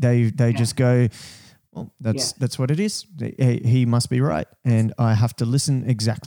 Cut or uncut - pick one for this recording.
uncut